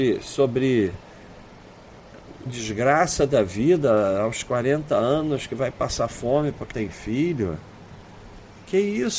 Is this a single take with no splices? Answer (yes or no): no